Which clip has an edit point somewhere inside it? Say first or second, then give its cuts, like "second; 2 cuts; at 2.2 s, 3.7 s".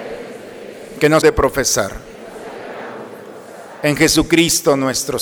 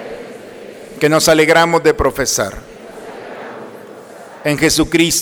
first; 1 cut; at 1.2 s